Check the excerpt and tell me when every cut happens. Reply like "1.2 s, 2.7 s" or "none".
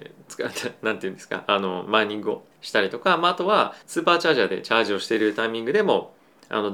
2.5 s, 3.8 s